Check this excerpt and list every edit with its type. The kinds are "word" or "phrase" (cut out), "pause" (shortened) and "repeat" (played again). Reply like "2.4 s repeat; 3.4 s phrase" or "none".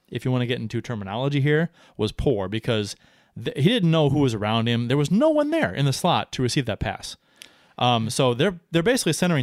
none